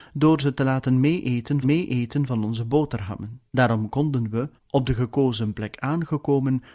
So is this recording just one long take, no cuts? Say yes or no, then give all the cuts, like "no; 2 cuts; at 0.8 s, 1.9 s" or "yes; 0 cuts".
no; 3 cuts; at 1.6 s, 3.5 s, 4.6 s